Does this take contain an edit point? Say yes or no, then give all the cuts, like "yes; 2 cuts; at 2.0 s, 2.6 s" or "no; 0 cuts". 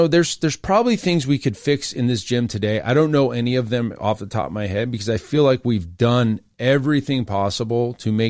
no; 0 cuts